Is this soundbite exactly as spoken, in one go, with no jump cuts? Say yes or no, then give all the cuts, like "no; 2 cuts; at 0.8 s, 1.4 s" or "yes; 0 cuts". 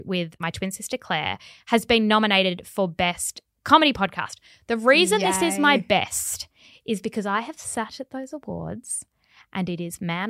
yes; 0 cuts